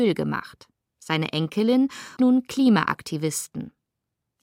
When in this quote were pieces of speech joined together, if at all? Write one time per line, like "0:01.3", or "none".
0:02.2